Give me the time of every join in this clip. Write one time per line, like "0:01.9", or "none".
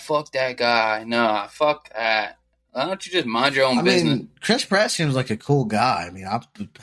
none